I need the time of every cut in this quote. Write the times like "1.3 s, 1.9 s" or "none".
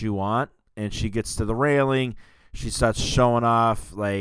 none

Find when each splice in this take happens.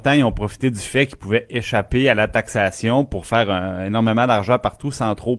none

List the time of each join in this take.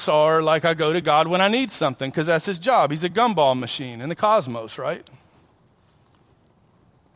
none

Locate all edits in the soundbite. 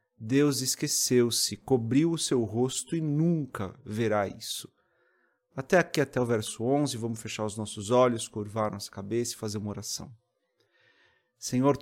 none

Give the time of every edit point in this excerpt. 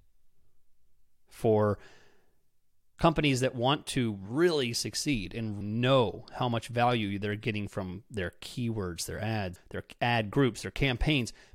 5.6 s, 9.6 s

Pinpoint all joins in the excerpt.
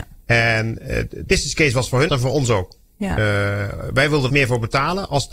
1.3 s, 2.1 s, 4.3 s

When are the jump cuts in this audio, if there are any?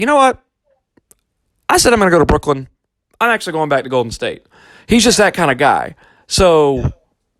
none

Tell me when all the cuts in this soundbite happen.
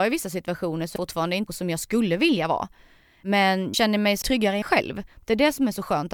1.0 s, 1.5 s, 3.7 s, 4.2 s, 4.6 s

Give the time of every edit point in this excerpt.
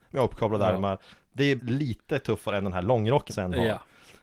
1.6 s, 3.3 s

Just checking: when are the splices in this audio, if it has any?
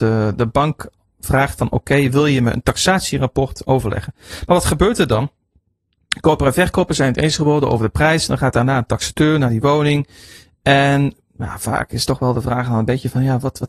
none

